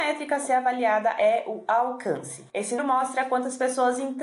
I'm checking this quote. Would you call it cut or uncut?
cut